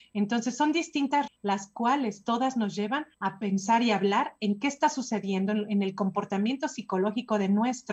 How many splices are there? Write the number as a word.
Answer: two